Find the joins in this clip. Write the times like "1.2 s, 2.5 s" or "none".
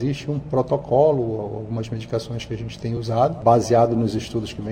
none